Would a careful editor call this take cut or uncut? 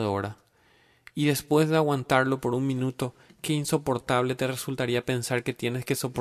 uncut